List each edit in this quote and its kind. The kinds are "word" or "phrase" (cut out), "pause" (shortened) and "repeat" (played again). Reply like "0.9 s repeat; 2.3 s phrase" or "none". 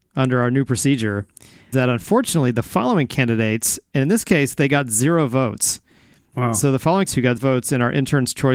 1.7 s word; 7.1 s word; 7.4 s word